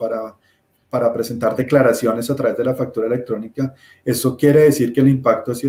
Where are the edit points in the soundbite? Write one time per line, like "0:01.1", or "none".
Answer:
none